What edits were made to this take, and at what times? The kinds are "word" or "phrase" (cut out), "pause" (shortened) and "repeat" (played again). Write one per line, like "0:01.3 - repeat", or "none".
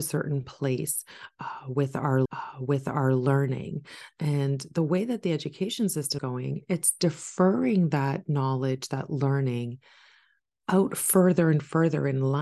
0:02.3 - repeat
0:06.2 - word